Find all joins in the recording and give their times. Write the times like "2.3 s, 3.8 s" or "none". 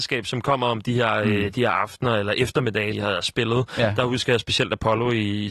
2.9 s